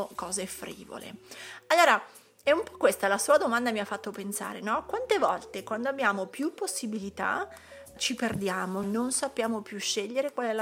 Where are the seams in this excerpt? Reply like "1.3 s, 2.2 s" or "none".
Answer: 8.0 s, 8.8 s